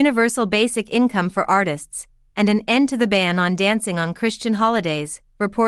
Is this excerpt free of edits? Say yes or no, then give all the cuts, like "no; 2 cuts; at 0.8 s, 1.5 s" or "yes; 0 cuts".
yes; 0 cuts